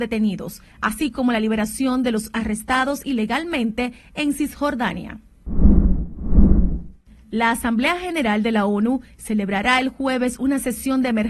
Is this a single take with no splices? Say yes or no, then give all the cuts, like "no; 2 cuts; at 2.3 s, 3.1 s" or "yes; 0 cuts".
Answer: yes; 0 cuts